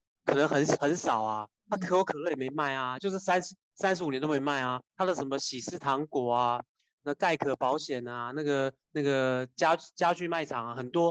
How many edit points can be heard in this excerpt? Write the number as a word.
three